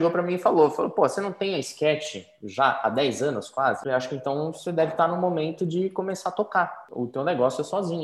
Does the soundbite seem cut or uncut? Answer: uncut